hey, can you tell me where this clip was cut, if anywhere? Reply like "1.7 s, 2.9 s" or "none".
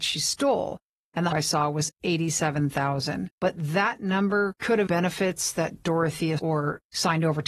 1.3 s, 3.3 s, 4.9 s, 6.4 s